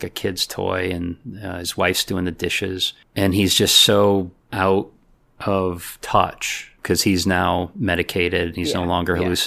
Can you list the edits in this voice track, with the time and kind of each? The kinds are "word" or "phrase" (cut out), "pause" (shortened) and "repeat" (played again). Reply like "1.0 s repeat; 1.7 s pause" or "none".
none